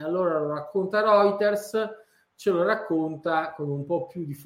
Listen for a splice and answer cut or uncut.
uncut